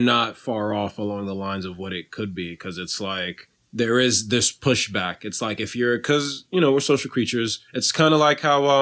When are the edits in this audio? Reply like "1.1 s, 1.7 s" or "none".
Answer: 3.5 s, 7.7 s